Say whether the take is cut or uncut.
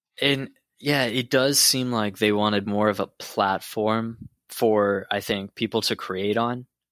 cut